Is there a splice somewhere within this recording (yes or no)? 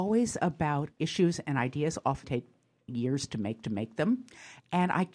yes